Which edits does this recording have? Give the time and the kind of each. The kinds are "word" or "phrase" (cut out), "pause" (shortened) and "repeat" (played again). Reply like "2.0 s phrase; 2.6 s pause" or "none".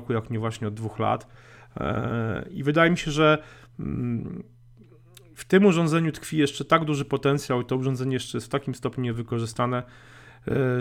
none